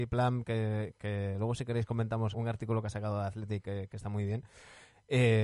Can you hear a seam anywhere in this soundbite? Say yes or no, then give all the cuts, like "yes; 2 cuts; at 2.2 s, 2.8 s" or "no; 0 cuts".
yes; 1 cut; at 2.3 s